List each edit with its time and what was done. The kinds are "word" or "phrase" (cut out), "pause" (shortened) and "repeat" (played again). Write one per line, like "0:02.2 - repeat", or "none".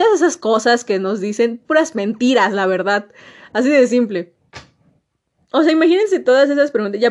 none